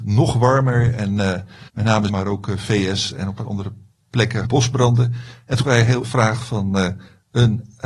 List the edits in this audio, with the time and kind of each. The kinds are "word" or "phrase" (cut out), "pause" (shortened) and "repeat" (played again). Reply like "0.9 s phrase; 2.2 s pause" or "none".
1.7 s pause; 2.1 s word; 3.4 s word; 4.4 s word; 5.6 s word; 6.0 s word